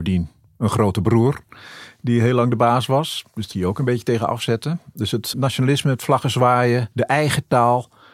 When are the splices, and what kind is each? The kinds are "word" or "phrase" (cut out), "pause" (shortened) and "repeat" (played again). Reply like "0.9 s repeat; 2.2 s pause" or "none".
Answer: 3.5 s word; 5.3 s word; 6.9 s pause